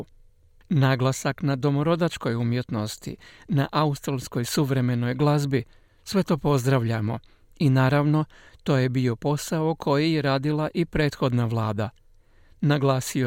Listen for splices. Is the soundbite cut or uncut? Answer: uncut